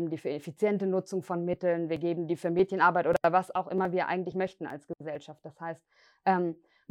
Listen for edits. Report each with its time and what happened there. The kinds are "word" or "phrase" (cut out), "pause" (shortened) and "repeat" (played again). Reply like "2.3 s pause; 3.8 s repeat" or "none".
none

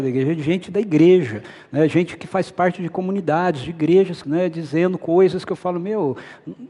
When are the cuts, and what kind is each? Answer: 4.2 s word

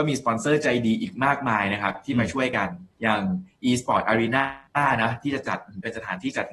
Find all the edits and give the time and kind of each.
2.9 s pause; 4.7 s pause

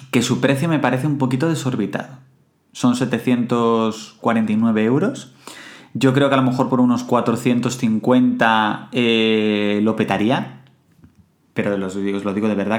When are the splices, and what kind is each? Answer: none

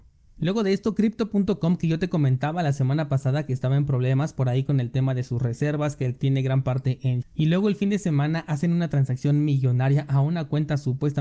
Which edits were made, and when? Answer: 7.2 s word

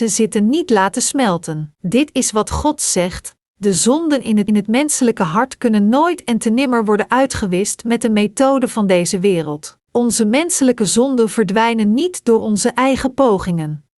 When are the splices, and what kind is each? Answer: 1.8 s pause; 4.5 s repeat; 9.8 s pause

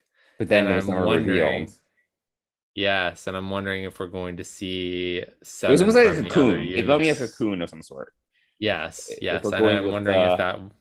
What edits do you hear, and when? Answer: 7.0 s word

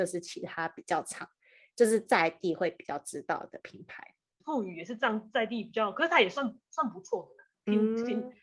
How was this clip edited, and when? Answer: none

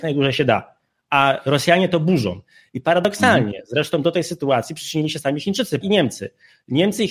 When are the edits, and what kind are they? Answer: 5.8 s phrase

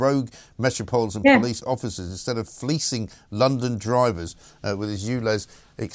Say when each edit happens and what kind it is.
none

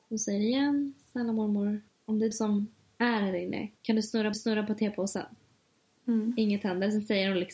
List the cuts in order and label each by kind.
1.9 s pause; 2.3 s word; 3.8 s pause; 4.3 s repeat

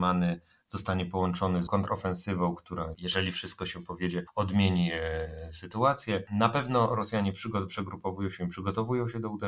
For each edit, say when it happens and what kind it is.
1.7 s word; 2.9 s word

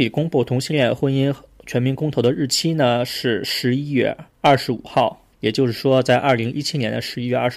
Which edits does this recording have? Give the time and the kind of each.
4.3 s pause; 5.3 s pause

